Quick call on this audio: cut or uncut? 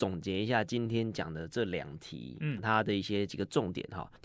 cut